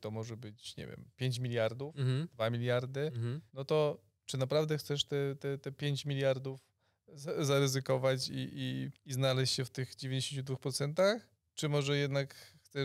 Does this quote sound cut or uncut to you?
cut